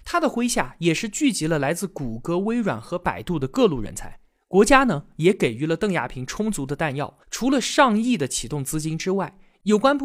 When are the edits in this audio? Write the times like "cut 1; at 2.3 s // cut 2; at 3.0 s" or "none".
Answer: cut 1; at 7.2 s